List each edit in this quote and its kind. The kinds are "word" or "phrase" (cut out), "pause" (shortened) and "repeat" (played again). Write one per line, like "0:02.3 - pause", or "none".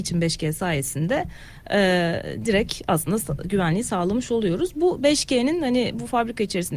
none

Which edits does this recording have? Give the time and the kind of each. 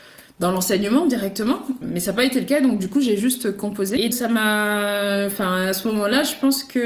0:01.8 - word
0:04.1 - word

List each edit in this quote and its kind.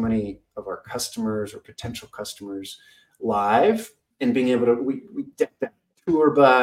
0:04.1 - pause

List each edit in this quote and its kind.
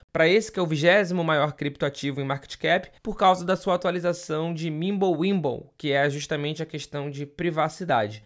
0:03.0 - pause

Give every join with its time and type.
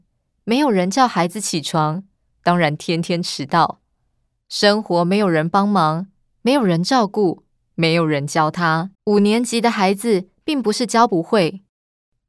0:08.9 - pause

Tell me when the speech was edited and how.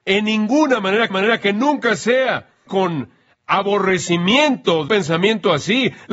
0:01.1 - repeat
0:02.7 - phrase
0:04.9 - word

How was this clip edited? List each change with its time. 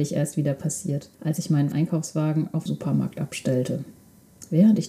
0:01.1 - pause
0:01.7 - word
0:02.7 - phrase

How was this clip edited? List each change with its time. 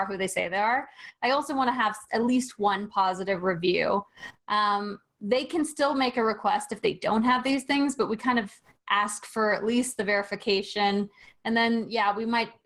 none

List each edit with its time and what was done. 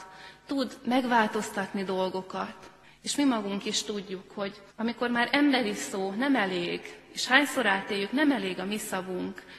0:02.8 - pause
0:04.7 - pause

